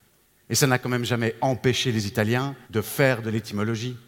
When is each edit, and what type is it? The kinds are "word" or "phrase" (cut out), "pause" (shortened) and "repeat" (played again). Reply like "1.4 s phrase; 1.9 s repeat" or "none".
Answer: 2.6 s pause